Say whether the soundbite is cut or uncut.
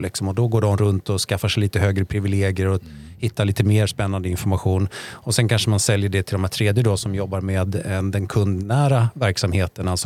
uncut